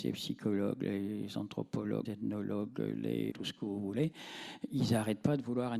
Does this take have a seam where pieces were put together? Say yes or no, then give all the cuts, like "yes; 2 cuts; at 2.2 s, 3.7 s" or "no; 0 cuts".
yes; 2 cuts; at 2.0 s, 3.3 s